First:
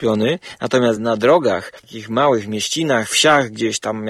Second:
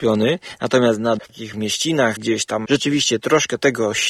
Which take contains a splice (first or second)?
second